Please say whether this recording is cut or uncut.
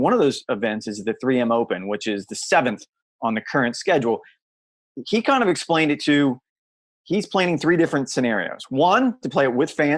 uncut